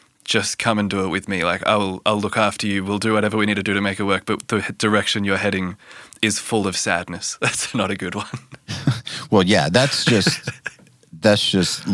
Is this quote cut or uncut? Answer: uncut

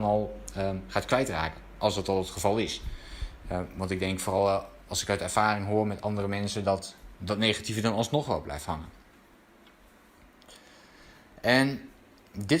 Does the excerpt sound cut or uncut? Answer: uncut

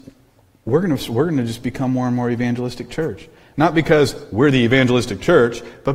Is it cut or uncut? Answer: uncut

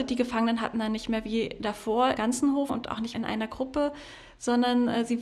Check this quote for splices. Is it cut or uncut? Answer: cut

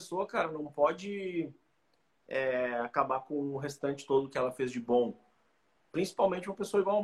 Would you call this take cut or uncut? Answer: uncut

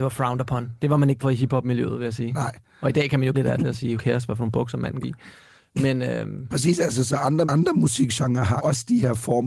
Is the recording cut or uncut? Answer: cut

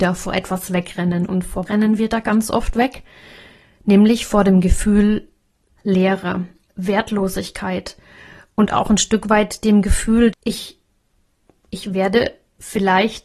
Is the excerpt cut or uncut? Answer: cut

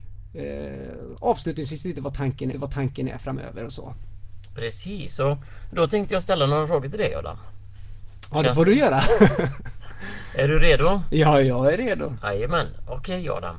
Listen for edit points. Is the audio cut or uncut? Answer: cut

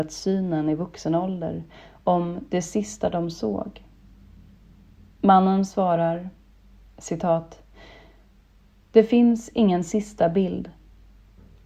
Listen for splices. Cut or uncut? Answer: uncut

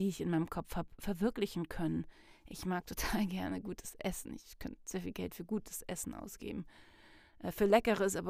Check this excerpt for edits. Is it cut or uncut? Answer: uncut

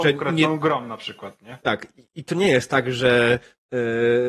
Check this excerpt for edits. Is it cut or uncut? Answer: uncut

